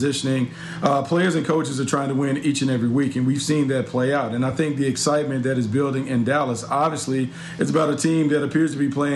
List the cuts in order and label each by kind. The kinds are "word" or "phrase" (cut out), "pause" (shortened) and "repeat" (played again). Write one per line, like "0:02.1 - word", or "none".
none